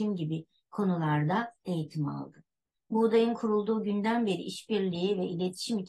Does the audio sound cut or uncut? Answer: uncut